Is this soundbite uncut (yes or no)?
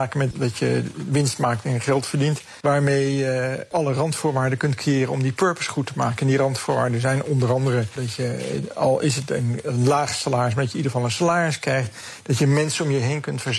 yes